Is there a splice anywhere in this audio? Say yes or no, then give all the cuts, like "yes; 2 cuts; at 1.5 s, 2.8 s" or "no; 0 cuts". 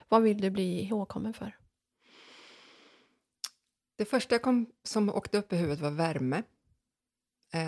no; 0 cuts